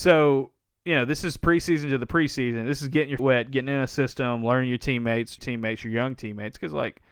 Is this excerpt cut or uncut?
cut